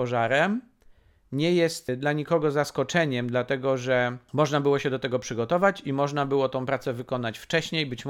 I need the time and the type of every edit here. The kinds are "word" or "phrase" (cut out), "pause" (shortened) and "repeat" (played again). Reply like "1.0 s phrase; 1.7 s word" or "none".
none